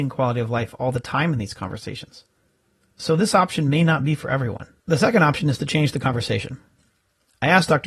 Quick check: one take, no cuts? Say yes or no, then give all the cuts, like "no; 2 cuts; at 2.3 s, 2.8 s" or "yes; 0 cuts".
no; 1 cut; at 4.8 s